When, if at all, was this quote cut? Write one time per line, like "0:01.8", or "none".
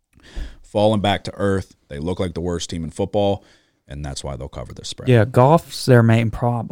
none